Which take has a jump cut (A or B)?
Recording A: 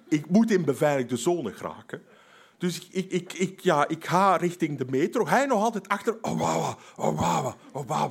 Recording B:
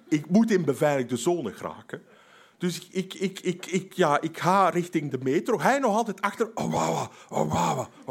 A